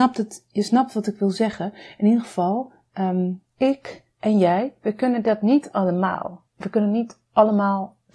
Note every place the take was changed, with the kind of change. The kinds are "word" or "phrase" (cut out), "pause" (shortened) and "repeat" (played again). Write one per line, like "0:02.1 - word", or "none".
0:03.5 - pause
0:06.5 - pause